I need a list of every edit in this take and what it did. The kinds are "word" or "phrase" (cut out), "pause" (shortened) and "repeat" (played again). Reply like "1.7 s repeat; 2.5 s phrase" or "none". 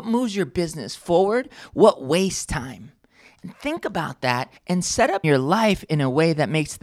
4.6 s pause; 5.2 s phrase